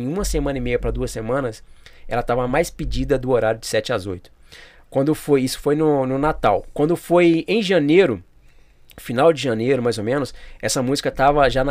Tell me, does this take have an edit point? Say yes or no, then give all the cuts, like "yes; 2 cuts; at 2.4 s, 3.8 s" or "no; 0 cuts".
no; 0 cuts